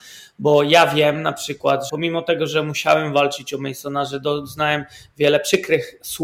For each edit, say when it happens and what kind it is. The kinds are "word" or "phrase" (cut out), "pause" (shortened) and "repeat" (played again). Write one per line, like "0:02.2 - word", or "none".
0:01.9 - word